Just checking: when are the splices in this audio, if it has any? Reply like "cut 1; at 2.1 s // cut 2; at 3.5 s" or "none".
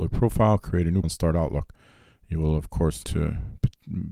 cut 1; at 1.0 s // cut 2; at 3.0 s